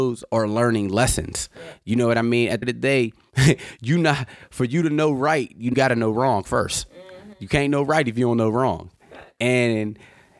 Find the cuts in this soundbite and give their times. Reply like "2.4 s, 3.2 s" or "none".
2.6 s, 5.7 s